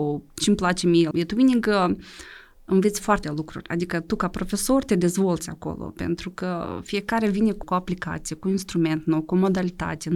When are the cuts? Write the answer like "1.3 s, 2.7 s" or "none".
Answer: 1.1 s, 3.2 s, 7.6 s